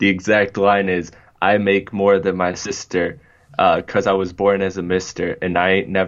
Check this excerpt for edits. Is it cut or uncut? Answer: uncut